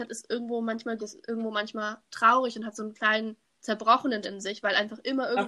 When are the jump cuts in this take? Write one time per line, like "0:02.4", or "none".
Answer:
0:01.0
0:04.2